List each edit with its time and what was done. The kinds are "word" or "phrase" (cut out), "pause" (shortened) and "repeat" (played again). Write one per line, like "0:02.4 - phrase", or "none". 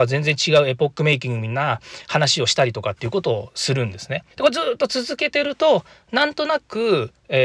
0:04.3 - pause